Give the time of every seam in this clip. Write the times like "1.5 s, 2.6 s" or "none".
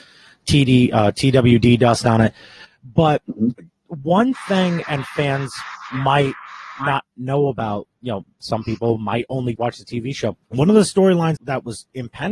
4.8 s, 9.6 s, 10.4 s, 11.4 s